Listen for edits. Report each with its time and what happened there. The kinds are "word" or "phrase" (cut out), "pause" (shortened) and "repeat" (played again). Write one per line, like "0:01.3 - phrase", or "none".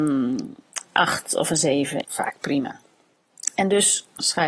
0:02.0 - phrase